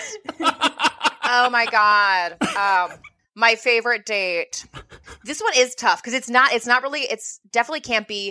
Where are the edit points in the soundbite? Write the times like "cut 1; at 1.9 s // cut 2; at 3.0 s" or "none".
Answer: none